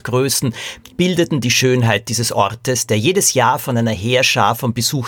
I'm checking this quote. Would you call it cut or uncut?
cut